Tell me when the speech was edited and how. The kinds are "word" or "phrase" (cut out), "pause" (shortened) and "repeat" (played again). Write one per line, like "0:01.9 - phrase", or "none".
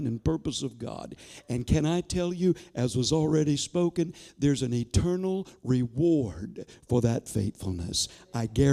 none